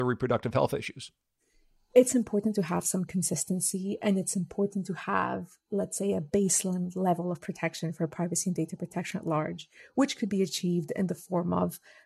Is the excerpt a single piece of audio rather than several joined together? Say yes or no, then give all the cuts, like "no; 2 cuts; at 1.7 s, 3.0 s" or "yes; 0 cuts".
yes; 0 cuts